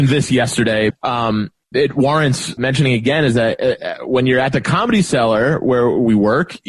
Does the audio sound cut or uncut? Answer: cut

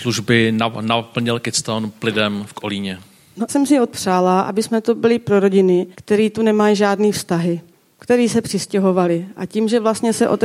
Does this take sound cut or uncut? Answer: cut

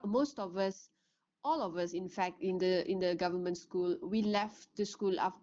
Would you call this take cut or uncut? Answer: uncut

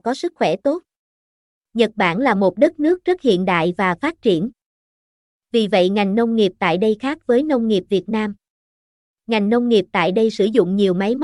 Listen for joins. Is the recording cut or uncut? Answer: uncut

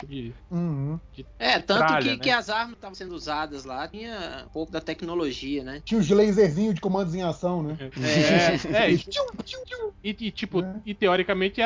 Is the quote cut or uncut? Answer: uncut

